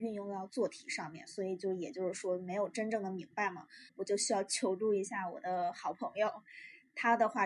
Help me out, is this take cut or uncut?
cut